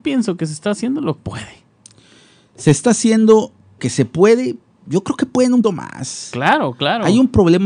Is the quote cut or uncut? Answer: cut